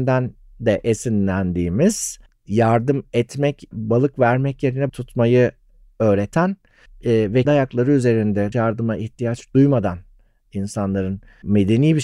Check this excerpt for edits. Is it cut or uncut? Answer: cut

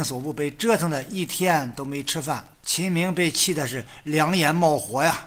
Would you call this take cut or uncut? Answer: cut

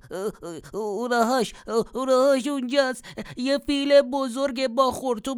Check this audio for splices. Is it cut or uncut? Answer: uncut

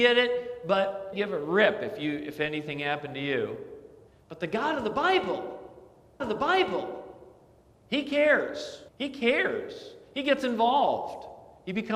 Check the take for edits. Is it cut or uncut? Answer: cut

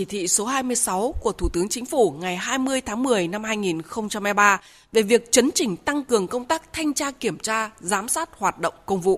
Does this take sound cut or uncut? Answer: uncut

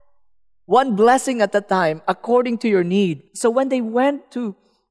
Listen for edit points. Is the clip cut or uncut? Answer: cut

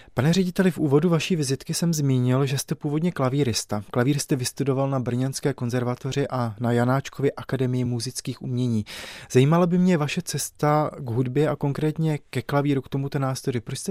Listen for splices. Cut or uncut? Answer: uncut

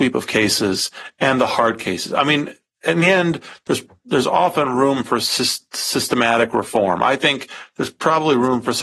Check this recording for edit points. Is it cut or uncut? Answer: uncut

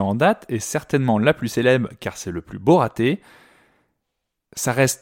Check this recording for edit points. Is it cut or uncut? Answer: uncut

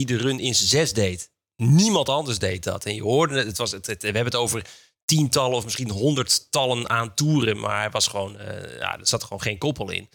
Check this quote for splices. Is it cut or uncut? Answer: uncut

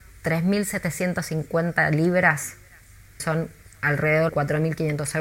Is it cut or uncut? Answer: cut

